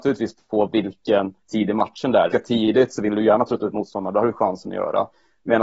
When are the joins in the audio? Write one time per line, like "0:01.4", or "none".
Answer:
0:01.4
0:02.3